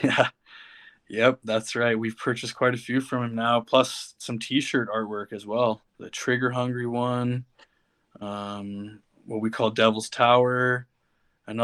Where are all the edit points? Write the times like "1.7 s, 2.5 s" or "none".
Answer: 5.9 s

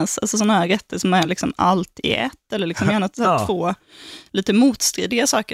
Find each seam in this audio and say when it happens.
none

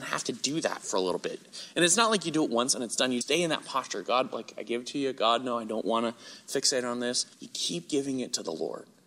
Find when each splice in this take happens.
3.2 s, 7.3 s

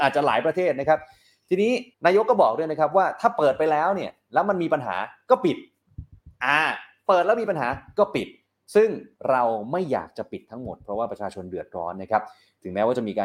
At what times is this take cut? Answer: 1.9 s

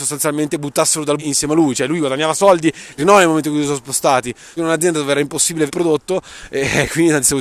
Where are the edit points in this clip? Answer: 1.2 s, 3.0 s, 4.6 s, 5.7 s

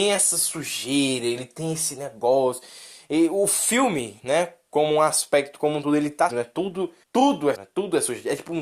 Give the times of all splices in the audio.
6.3 s, 7.0 s, 7.5 s

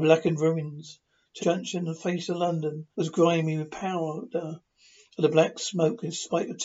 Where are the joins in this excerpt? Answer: 1.4 s, 2.9 s

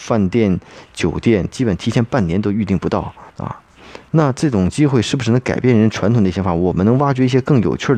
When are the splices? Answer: 3.3 s

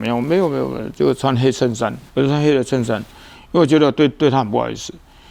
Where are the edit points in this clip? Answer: 2.1 s

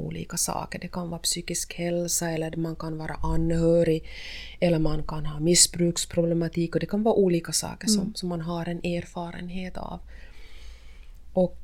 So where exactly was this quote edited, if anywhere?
none

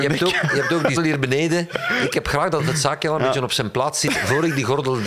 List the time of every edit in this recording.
1.0 s

